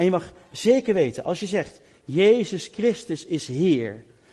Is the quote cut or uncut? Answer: uncut